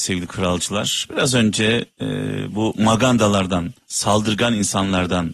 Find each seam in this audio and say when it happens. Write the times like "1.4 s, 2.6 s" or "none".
1.9 s, 3.8 s